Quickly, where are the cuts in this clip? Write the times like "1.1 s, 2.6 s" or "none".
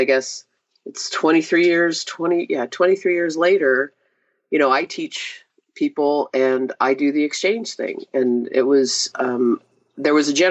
none